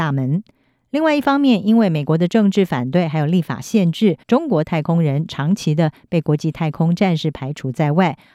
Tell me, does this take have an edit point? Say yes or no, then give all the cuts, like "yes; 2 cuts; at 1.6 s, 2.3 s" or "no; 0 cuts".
yes; 1 cut; at 4.2 s